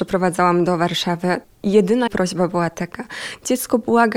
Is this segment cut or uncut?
cut